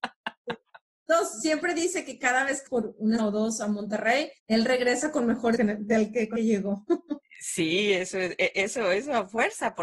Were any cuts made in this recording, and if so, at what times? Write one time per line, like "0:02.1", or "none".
0:02.7
0:03.2
0:04.4
0:05.6
0:06.4